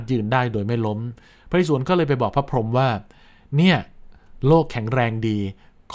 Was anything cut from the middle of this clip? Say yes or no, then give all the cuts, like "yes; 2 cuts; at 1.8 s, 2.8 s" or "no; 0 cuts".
no; 0 cuts